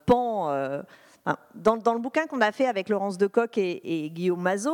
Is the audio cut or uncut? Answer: uncut